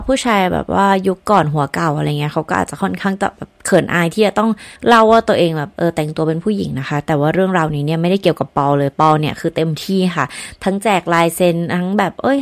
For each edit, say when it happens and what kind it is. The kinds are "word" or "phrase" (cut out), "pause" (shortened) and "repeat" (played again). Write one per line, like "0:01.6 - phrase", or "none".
0:04.8 - pause